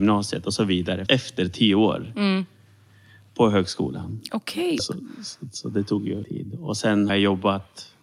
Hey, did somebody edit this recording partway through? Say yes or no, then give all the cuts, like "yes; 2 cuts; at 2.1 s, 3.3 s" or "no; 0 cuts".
yes; 4 cuts; at 1.1 s, 4.8 s, 6.2 s, 7.1 s